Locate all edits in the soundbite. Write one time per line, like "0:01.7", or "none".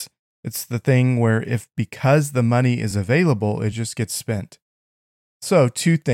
none